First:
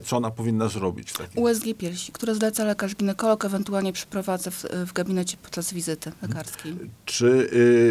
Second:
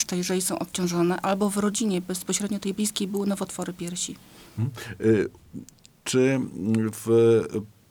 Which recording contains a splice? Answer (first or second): first